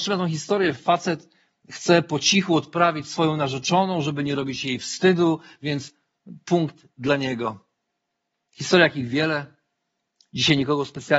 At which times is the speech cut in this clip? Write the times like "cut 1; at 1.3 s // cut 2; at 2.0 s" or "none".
none